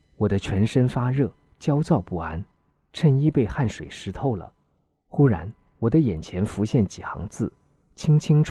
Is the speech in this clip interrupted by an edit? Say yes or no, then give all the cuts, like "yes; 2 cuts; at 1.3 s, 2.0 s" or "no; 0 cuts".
no; 0 cuts